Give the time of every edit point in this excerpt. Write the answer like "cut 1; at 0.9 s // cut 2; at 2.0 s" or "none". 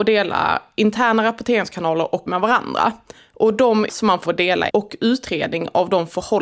cut 1; at 2.3 s // cut 2; at 3.2 s // cut 3; at 3.9 s // cut 4; at 4.2 s // cut 5; at 4.7 s